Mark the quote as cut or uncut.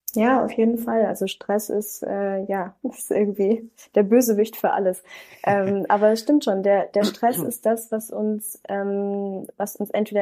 uncut